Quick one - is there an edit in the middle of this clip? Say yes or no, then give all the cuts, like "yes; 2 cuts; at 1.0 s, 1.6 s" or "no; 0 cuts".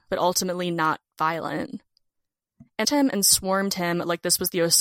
yes; 1 cut; at 2.8 s